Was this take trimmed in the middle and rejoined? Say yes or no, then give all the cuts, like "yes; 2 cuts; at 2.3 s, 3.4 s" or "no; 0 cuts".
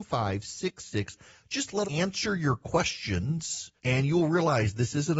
yes; 2 cuts; at 1.8 s, 3.8 s